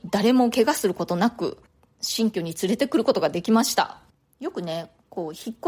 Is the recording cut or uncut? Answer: uncut